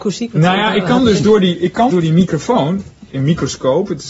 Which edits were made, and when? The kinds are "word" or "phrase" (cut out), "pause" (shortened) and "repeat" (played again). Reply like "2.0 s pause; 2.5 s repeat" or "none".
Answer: 1.9 s word; 3.1 s word